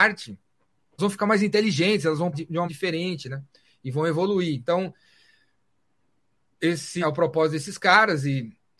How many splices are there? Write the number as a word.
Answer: four